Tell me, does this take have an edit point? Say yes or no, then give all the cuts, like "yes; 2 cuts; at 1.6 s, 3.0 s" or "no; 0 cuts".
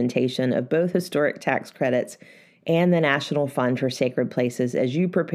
no; 0 cuts